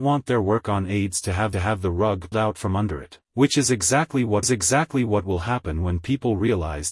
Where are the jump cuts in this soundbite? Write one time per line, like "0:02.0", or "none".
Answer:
0:01.5
0:02.3
0:03.2
0:04.4